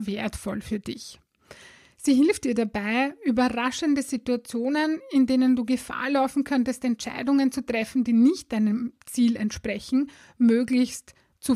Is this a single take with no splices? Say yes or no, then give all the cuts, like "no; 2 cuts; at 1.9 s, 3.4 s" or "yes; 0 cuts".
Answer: yes; 0 cuts